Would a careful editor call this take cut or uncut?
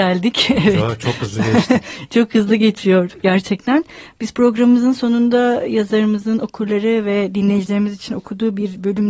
uncut